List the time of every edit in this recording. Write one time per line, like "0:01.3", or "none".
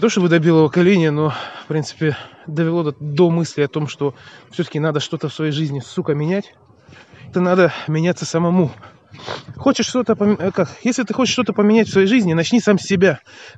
0:07.3